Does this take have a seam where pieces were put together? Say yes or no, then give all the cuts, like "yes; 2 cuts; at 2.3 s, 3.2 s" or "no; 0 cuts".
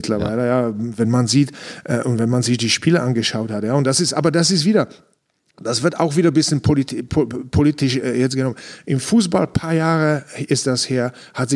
no; 0 cuts